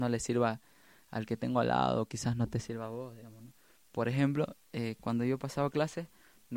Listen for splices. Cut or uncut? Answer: uncut